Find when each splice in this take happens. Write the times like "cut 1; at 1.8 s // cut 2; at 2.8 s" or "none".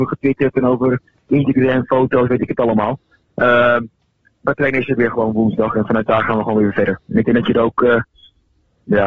none